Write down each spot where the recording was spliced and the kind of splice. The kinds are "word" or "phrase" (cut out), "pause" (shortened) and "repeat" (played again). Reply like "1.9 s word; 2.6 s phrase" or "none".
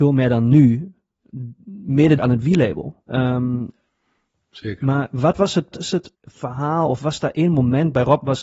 2.2 s word; 5.7 s word; 6.1 s pause